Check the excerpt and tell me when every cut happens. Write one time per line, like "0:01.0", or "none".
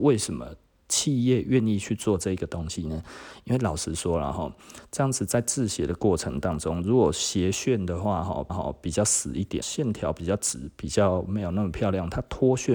0:08.5
0:09.6